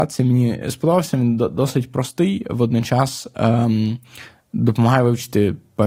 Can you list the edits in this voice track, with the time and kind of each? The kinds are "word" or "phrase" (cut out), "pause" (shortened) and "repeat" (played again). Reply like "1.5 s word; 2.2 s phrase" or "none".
none

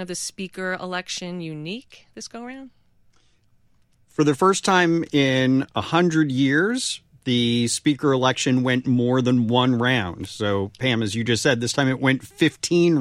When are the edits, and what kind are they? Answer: none

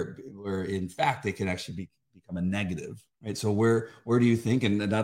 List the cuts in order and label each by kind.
3.1 s pause

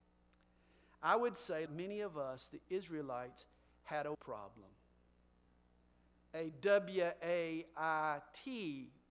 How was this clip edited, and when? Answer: 1.7 s word; 4.1 s word

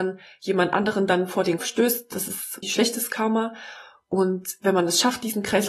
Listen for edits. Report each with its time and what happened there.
1.6 s word; 2.6 s word

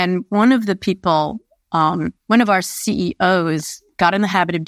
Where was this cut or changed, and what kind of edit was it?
2.2 s pause

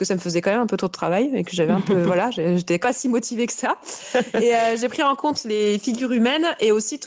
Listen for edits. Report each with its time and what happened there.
2.8 s word

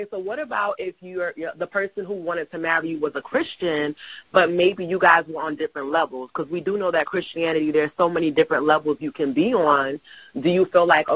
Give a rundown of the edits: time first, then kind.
none

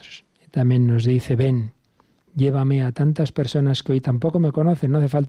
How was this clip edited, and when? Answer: none

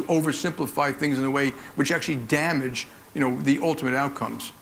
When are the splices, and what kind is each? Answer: none

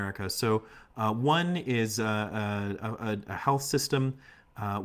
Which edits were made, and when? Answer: 3.3 s word

